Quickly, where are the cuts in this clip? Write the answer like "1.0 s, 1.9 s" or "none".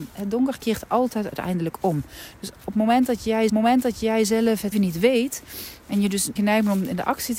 3.5 s, 4.7 s, 6.4 s